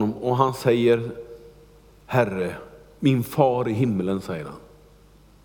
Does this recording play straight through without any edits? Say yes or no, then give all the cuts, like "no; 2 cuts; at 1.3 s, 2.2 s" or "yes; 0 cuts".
yes; 0 cuts